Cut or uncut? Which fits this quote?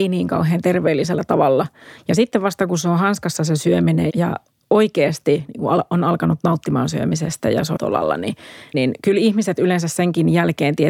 cut